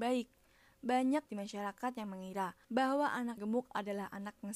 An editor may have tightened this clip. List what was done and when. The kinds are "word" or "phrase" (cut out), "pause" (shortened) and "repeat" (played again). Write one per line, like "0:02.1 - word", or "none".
0:01.3 - word
0:02.6 - pause
0:03.4 - word